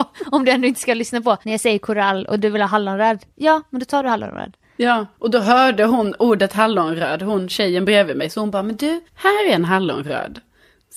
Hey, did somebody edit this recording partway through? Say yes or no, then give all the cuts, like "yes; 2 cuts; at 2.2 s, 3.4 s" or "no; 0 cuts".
yes; 3 cuts; at 1.4 s, 5.1 s, 9.1 s